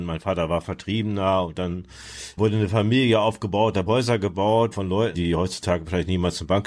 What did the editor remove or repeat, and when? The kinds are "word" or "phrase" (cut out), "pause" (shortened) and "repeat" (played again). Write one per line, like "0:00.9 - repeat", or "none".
0:02.4 - word
0:03.9 - word
0:04.7 - word
0:05.1 - word